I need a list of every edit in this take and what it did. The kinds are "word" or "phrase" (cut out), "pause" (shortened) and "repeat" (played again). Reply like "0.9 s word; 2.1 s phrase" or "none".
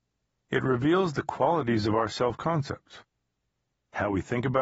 none